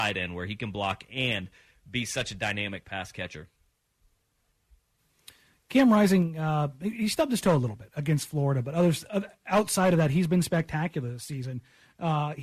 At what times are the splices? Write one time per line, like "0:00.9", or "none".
none